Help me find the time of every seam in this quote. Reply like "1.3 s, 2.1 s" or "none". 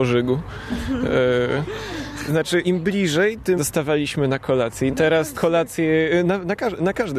2.3 s, 2.6 s, 3.6 s, 4.9 s, 5.3 s